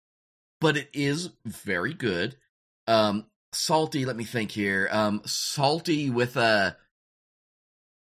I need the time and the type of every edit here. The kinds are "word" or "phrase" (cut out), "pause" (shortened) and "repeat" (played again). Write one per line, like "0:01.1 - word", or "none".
none